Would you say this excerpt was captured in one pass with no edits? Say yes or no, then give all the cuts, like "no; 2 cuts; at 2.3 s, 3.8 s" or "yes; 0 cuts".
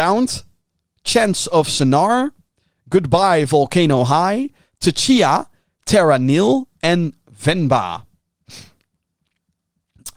yes; 0 cuts